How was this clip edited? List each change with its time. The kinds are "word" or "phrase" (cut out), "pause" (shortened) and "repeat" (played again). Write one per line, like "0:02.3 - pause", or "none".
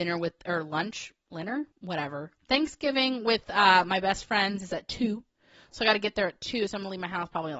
0:01.7 - pause